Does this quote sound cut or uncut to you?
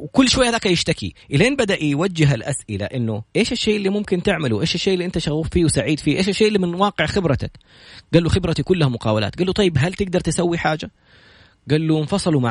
cut